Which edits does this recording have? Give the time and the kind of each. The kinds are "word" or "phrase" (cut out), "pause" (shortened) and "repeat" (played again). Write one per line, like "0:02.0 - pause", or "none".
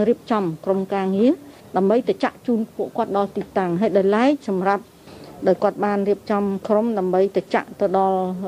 none